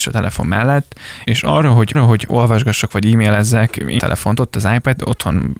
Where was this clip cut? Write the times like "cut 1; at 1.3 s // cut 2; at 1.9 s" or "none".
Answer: cut 1; at 1.3 s // cut 2; at 1.9 s // cut 3; at 4.0 s